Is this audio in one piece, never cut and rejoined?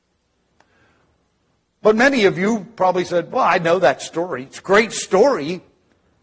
yes; 0 cuts

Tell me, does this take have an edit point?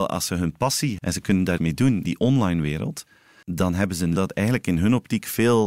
yes; 5 cuts; at 1.0 s, 1.6 s, 2.0 s, 3.4 s, 4.2 s

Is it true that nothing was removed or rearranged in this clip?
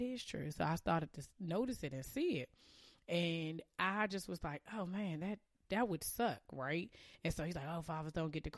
yes; 0 cuts

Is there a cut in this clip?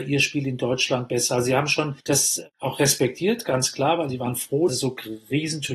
yes; 2 cuts; at 2.0 s, 4.7 s

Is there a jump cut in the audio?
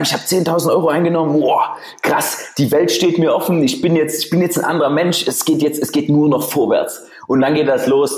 no; 0 cuts

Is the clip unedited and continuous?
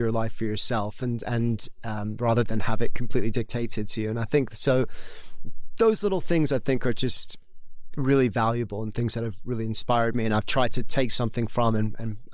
yes; 0 cuts

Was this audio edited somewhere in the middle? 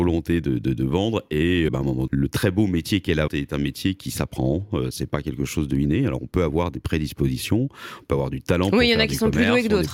yes; 3 cuts; at 1.7 s, 2.1 s, 3.3 s

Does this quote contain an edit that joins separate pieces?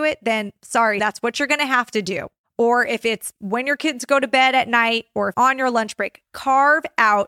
yes; 1 cut; at 5.3 s

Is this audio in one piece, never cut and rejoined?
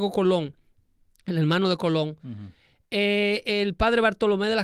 yes; 0 cuts

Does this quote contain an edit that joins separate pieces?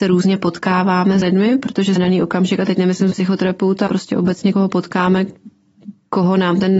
yes; 5 cuts; at 1.2 s, 2.0 s, 3.1 s, 3.9 s, 4.5 s

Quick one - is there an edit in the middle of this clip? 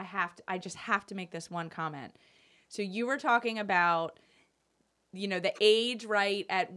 no; 0 cuts

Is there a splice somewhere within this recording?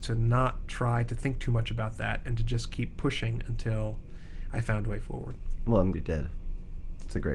yes; 1 cut; at 5.9 s

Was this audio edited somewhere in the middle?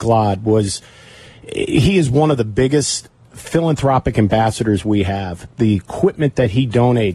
yes; 1 cut; at 5.5 s

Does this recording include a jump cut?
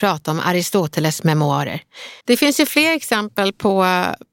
yes; 1 cut; at 2.2 s

